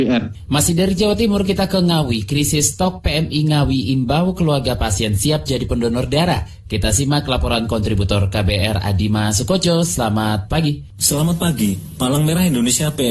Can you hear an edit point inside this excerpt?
no; 0 cuts

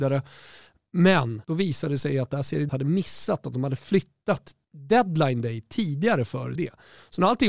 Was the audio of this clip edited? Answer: yes; 4 cuts; at 1.4 s, 2.7 s, 4.6 s, 6.5 s

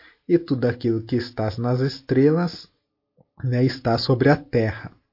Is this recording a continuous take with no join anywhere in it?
yes; 0 cuts

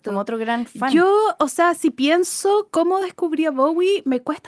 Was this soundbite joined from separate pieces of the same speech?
no; 0 cuts

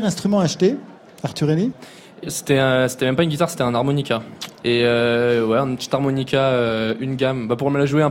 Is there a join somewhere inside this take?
no; 0 cuts

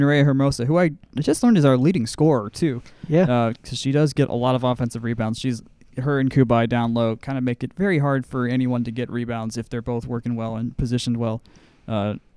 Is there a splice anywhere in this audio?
no; 0 cuts

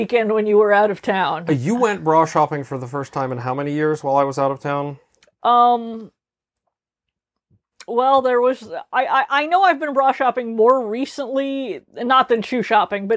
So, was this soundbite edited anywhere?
no; 0 cuts

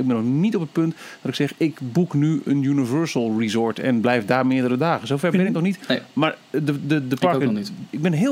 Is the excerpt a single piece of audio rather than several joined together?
yes; 0 cuts

